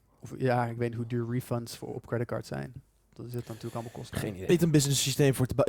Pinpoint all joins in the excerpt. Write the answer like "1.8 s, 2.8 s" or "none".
4.5 s